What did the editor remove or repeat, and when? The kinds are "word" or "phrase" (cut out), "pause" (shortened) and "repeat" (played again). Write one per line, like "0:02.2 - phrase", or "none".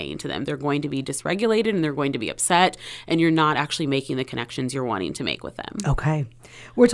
none